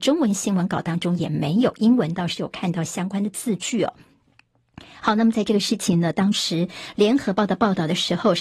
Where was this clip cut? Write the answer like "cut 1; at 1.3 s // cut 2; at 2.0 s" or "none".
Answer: none